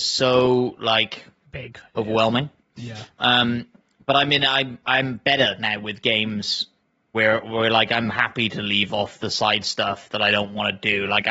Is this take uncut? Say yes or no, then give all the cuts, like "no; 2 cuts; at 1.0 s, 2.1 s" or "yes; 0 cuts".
yes; 0 cuts